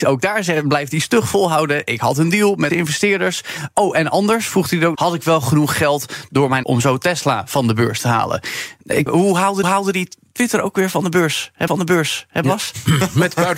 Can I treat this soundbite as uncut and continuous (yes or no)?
no